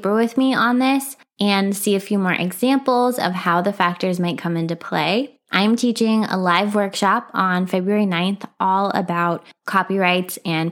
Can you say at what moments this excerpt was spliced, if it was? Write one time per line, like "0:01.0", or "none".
none